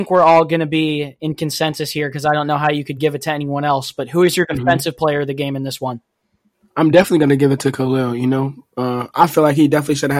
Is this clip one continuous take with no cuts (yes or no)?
yes